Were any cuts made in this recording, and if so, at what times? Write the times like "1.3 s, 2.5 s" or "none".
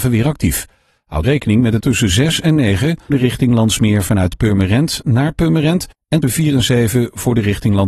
1.2 s, 1.8 s, 3.1 s, 6.2 s